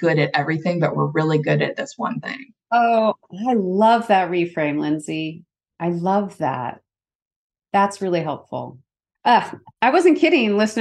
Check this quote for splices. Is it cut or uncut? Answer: uncut